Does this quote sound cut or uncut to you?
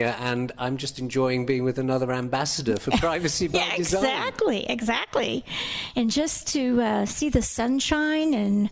uncut